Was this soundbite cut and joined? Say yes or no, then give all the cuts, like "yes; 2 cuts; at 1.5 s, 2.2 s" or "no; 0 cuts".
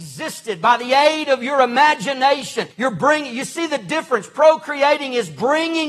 yes; 1 cut; at 2.7 s